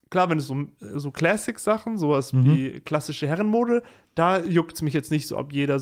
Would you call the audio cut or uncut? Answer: uncut